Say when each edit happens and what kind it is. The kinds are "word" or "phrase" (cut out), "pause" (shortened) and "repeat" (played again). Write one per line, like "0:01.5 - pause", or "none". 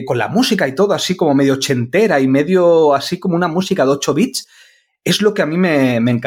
none

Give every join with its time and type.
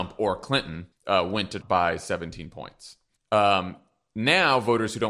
0:00.9 - pause
0:01.6 - word
0:03.2 - pause

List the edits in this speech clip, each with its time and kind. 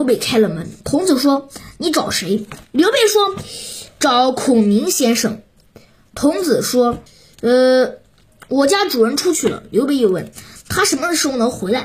0:07.1 - pause

